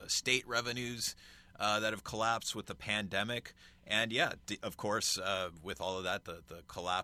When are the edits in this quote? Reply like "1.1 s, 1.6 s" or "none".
none